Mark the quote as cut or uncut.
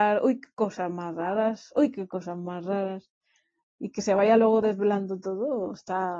uncut